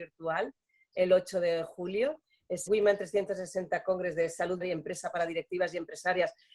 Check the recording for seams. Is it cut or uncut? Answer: cut